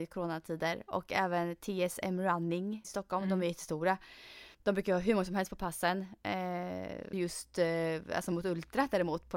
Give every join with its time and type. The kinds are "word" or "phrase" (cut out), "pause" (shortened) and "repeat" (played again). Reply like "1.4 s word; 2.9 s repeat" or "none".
2.8 s word; 4.5 s pause; 7.1 s phrase

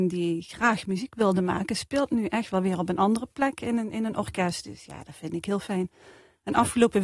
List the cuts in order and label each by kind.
none

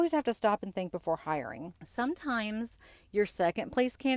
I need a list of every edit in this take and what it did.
1.8 s pause

